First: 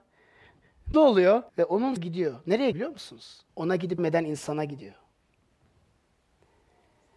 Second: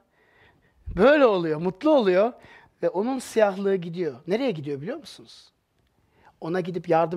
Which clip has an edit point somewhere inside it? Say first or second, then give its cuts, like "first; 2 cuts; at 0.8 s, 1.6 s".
first; 6 cuts; at 0.9 s, 1.5 s, 2.0 s, 2.7 s, 3.5 s, 4.0 s